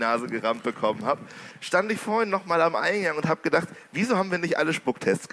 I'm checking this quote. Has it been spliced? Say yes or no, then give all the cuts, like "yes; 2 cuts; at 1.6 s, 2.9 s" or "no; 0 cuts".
no; 0 cuts